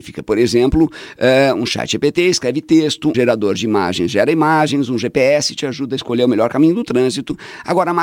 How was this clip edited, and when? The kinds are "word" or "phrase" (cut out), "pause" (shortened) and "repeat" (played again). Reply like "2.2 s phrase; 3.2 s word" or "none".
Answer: 3.1 s word